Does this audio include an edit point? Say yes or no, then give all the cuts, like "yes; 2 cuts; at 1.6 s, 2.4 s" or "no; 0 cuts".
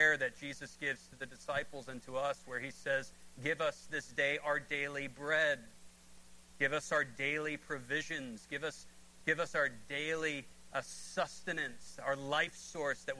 no; 0 cuts